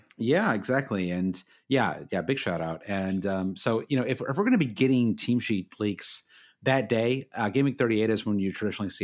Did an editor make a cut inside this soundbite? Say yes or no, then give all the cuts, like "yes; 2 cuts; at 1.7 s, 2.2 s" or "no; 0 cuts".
no; 0 cuts